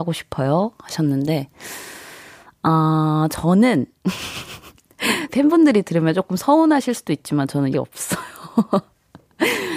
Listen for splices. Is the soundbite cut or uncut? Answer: cut